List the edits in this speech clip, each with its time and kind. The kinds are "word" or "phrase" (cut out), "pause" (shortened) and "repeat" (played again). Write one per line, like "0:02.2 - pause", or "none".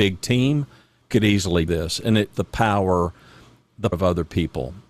0:01.1 - word
0:01.7 - word
0:02.3 - word
0:03.9 - word